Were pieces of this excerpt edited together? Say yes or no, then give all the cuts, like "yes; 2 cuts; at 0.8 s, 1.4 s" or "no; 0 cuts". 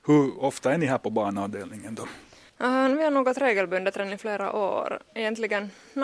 no; 0 cuts